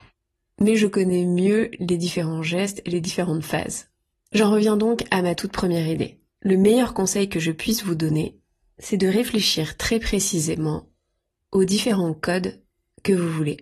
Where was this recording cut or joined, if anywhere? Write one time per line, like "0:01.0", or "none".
0:04.1
0:06.3